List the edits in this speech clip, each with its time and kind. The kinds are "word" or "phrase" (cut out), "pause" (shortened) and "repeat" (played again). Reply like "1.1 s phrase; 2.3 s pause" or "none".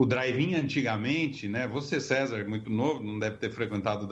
none

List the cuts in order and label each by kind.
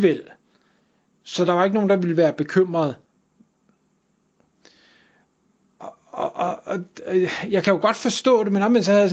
none

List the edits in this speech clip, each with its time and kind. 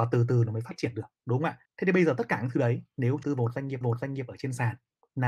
1.1 s pause; 1.7 s pause; 3.2 s phrase; 3.8 s repeat

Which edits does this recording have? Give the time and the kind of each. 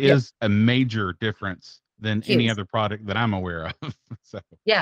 1.9 s pause

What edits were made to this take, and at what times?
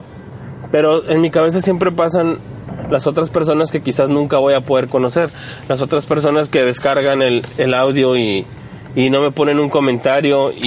none

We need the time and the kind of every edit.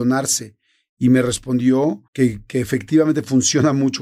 2.1 s pause

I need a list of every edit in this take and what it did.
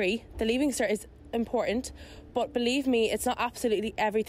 none

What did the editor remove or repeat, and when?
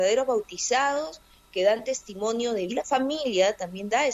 2.7 s phrase

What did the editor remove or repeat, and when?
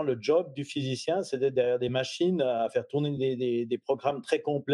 none

